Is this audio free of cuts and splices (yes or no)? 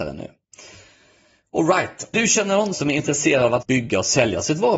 no